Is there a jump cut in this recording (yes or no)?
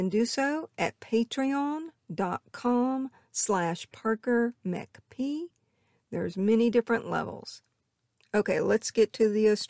no